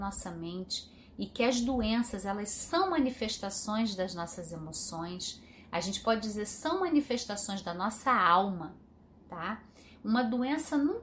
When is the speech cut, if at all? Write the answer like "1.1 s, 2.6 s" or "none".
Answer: none